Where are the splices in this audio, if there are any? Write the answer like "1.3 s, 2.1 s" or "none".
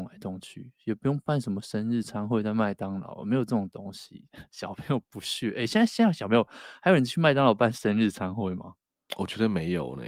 none